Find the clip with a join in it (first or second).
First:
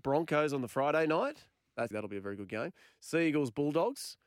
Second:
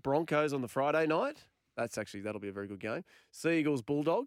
first